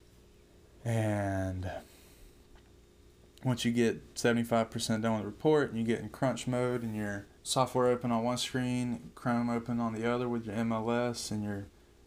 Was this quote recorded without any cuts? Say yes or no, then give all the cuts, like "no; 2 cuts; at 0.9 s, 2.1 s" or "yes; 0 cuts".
no; 1 cut; at 7.4 s